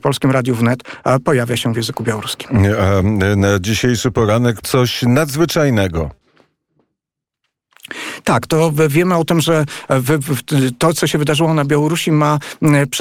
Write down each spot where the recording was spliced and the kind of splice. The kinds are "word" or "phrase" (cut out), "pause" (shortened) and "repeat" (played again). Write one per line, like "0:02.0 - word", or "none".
0:04.6 - word